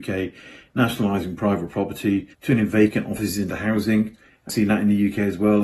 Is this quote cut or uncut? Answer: cut